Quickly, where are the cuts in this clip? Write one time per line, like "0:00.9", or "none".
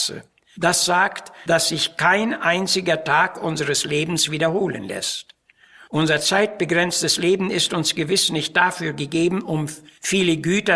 none